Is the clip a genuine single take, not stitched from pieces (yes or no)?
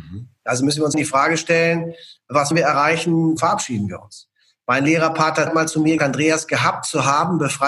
no